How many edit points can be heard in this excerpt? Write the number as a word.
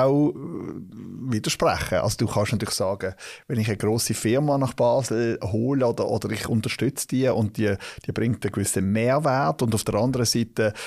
zero